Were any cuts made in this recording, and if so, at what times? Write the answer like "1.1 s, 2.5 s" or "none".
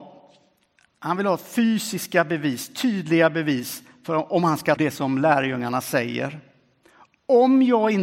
4.8 s